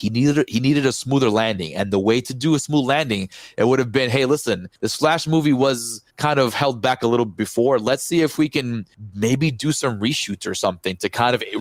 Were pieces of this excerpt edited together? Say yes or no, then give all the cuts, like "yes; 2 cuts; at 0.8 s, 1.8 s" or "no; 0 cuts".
yes; 2 cuts; at 4.8 s, 6.1 s